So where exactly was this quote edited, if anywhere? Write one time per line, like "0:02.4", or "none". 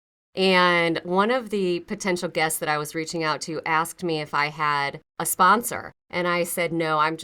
0:05.1
0:06.0

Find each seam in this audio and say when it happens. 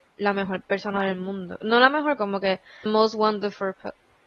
0:02.2
0:02.9

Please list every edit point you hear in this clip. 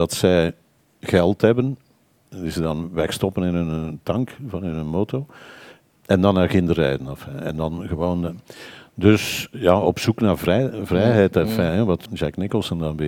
0:12.1

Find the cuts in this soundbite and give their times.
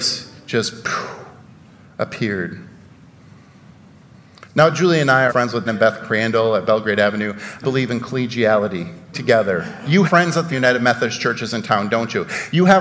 0:05.3
0:05.7
0:07.6
0:09.1
0:10.0
0:10.5

